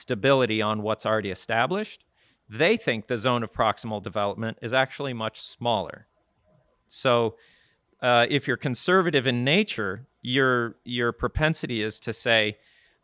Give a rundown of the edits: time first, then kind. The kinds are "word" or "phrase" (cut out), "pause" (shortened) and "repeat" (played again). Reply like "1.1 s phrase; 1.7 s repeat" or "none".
none